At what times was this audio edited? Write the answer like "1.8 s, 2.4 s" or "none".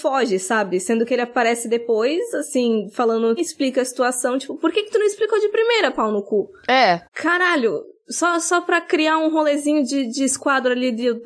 3.4 s, 7.0 s